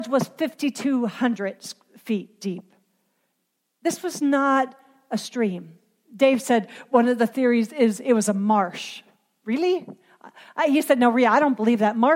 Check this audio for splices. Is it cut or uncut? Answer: uncut